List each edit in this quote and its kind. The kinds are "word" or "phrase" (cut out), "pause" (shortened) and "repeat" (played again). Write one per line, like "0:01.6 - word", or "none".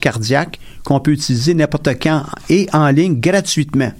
none